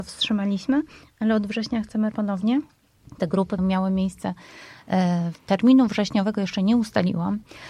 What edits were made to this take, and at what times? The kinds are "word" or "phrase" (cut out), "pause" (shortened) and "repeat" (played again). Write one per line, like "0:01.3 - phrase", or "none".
0:02.1 - word
0:03.6 - word
0:05.3 - word